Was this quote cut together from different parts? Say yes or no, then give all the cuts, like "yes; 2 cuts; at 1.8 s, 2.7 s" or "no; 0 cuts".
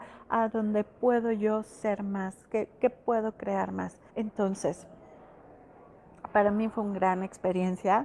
yes; 1 cut; at 4.1 s